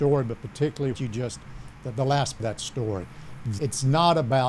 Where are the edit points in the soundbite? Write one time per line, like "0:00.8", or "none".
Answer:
0:00.9
0:02.4
0:03.6